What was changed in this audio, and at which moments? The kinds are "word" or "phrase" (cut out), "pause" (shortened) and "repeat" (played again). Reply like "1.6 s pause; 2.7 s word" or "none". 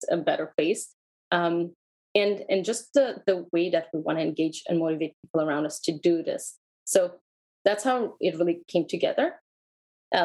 none